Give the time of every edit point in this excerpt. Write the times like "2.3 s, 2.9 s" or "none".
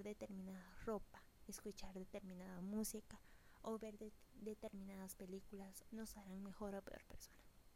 5.9 s